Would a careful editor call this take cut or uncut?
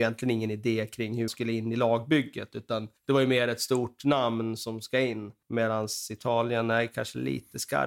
cut